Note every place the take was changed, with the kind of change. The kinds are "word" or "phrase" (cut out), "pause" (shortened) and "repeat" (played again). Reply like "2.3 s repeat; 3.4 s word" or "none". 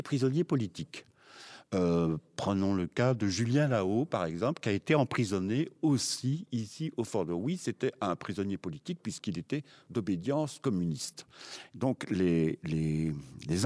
none